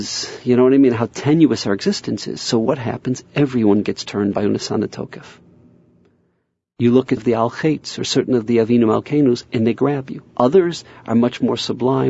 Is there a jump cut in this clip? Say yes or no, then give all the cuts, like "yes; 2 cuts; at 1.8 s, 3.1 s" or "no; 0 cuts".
yes; 3 cuts; at 4.3 s, 7.2 s, 10.3 s